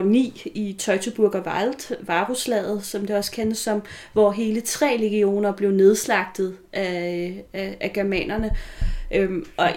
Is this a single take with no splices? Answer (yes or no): yes